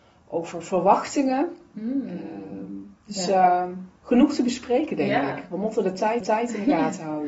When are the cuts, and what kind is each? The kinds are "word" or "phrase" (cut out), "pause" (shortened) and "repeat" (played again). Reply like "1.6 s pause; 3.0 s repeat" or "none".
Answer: 3.0 s pause; 4.0 s pause; 6.2 s repeat

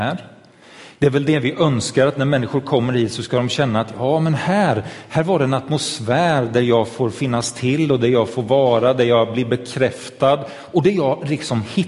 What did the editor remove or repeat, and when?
none

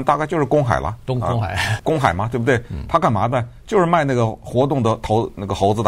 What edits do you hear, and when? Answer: 1.8 s word

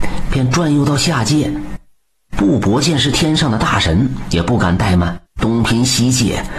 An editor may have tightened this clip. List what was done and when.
5.3 s pause

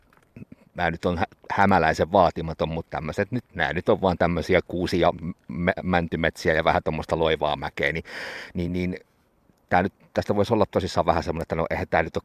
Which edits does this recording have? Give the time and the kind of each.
none

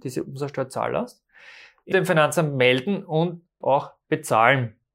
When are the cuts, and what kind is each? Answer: 1.9 s word; 3.6 s word

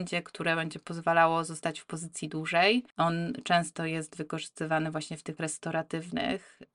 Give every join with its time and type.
2.9 s pause; 5.4 s word

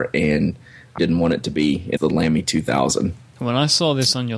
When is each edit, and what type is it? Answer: 1.0 s word; 2.0 s word

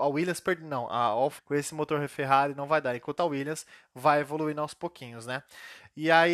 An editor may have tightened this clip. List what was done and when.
1.4 s word; 3.2 s word

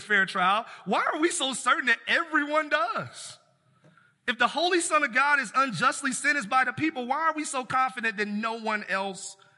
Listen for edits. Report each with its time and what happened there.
none

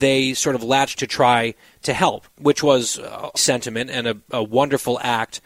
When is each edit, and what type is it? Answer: 0.9 s word; 2.3 s pause; 3.4 s word

